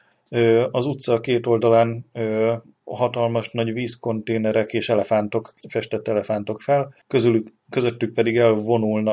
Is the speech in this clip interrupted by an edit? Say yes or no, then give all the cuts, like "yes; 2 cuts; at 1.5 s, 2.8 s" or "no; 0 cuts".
yes; 3 cuts; at 5.6 s, 6.6 s, 7.0 s